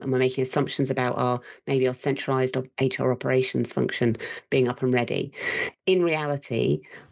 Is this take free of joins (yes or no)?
yes